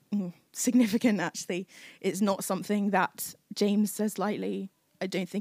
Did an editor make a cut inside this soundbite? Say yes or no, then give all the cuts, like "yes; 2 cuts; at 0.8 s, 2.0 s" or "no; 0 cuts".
no; 0 cuts